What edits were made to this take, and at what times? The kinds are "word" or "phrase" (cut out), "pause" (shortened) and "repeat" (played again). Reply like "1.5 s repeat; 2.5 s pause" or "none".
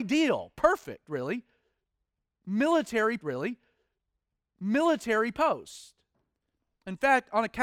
3.2 s repeat